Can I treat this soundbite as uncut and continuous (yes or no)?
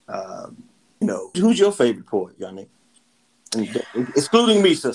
no